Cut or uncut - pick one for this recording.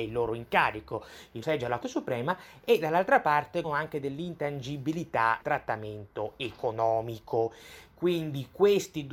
cut